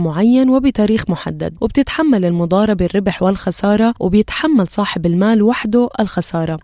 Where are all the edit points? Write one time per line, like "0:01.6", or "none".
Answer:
none